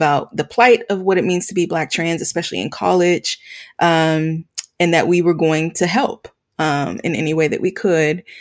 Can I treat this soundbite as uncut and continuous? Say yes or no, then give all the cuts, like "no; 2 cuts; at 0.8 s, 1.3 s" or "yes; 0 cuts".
yes; 0 cuts